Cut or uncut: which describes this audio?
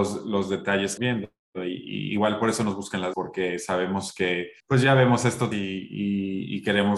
cut